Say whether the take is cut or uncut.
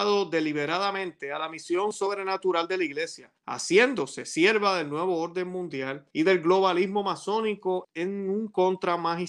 cut